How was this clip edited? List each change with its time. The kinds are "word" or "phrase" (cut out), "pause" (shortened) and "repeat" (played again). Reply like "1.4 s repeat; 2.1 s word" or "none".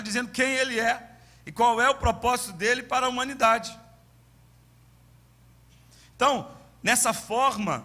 none